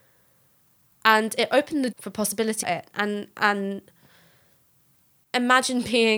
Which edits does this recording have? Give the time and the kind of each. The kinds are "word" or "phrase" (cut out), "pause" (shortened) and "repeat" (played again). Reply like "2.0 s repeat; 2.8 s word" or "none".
1.9 s word; 2.6 s phrase